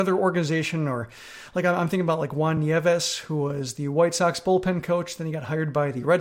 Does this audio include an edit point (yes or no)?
no